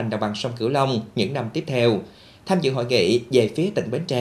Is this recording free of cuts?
yes; 0 cuts

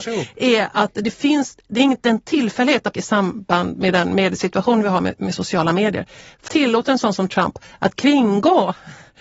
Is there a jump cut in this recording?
yes; 2 cuts; at 2.9 s, 6.5 s

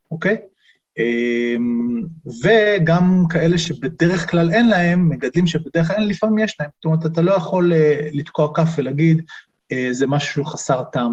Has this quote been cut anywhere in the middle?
yes; 1 cut; at 6.7 s

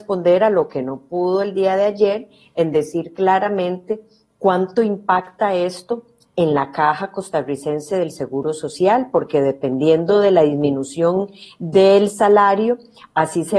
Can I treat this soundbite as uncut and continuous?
yes; 0 cuts

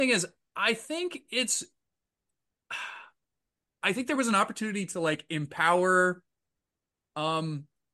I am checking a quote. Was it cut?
no; 0 cuts

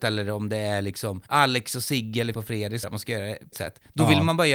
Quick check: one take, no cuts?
no; 4 cuts; at 1.3 s, 2.3 s, 2.8 s, 3.5 s

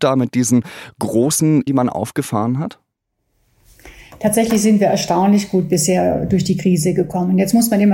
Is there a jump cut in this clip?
yes; 1 cut; at 1.7 s

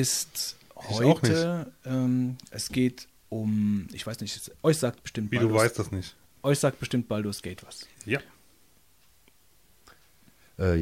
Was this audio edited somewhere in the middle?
yes; 1 cut; at 7.9 s

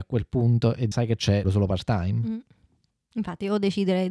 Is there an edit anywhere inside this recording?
yes; 2 cuts; at 0.9 s, 1.4 s

